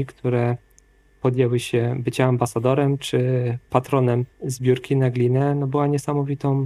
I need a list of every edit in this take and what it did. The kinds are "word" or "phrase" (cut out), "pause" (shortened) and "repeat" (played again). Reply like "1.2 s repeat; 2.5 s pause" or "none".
4.3 s pause